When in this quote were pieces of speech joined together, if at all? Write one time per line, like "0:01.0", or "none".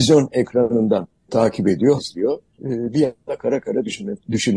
0:01.3
0:02.0
0:02.6
0:03.3